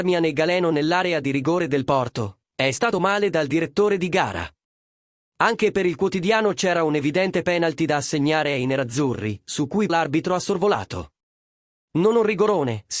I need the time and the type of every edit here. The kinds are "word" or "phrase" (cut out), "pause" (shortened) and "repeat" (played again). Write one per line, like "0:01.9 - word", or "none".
0:02.9 - word
0:09.9 - word